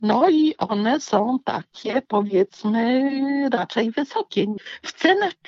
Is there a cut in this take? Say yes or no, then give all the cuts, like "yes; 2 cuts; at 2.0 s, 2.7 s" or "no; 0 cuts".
no; 0 cuts